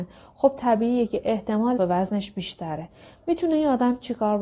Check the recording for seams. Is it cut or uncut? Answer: cut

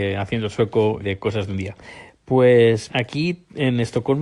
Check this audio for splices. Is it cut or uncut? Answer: cut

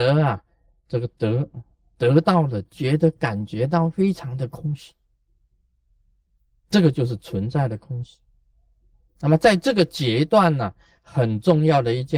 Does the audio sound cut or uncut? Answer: uncut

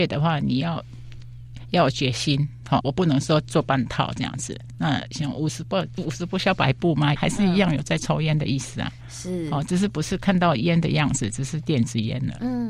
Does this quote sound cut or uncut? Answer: cut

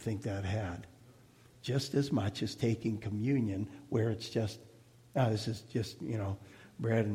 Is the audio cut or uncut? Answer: uncut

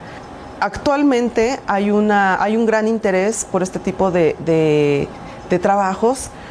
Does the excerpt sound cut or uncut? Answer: uncut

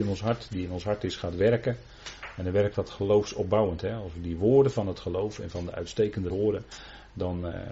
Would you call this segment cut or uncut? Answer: cut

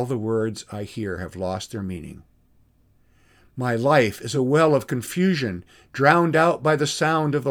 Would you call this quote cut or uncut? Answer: uncut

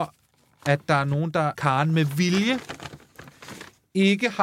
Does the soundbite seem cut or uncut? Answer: cut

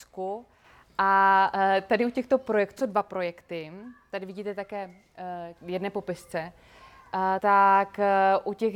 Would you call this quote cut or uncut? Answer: cut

